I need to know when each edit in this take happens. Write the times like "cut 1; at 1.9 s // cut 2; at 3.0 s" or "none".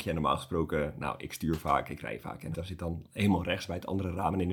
cut 1; at 2.5 s

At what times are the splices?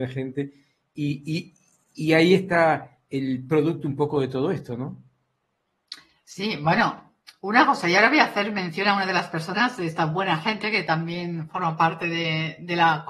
none

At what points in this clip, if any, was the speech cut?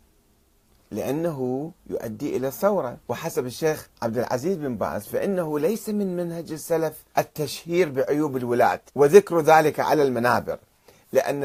cut 1; at 1.8 s // cut 2; at 3.0 s // cut 3; at 3.9 s // cut 4; at 7.1 s // cut 5; at 8.9 s

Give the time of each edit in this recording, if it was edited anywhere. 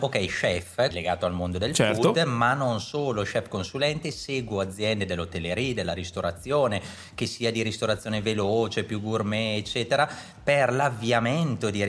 cut 1; at 0.9 s

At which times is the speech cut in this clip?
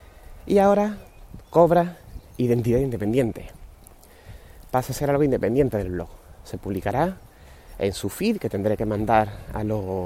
none

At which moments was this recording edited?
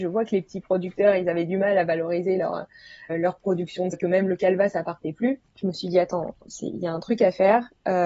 cut 1; at 3.1 s // cut 2; at 3.9 s // cut 3; at 5.5 s

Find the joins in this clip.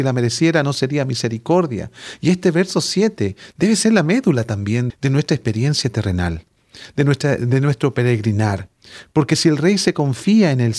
cut 1; at 4.9 s

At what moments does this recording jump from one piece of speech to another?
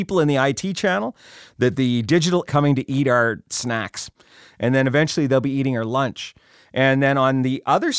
cut 1; at 2.4 s

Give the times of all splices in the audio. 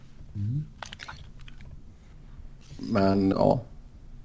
cut 1; at 3.3 s

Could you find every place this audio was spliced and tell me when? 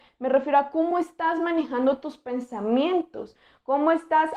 none

